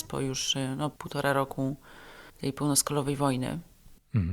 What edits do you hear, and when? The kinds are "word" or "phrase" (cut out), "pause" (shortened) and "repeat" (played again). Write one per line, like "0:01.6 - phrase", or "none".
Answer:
0:01.0 - pause
0:02.3 - pause